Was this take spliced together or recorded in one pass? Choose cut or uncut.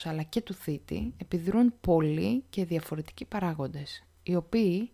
uncut